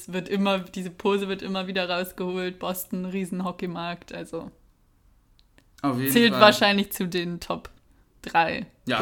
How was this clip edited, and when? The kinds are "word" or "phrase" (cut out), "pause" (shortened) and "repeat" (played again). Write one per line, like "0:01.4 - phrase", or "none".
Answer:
none